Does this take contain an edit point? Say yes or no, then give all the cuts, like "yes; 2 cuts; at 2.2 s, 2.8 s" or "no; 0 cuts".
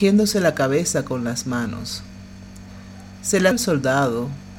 yes; 1 cut; at 3.5 s